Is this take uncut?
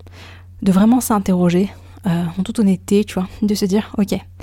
yes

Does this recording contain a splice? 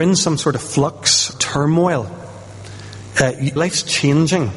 yes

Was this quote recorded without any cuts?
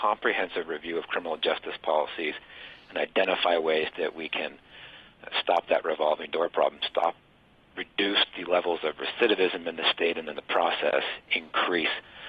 yes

